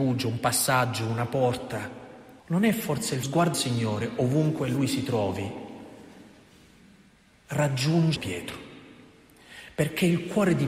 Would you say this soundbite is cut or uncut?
cut